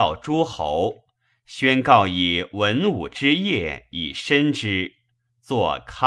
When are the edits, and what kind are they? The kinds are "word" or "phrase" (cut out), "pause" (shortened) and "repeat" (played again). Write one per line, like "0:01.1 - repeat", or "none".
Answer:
none